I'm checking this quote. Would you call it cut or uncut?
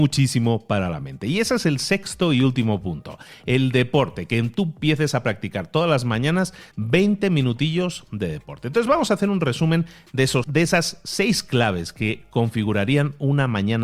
cut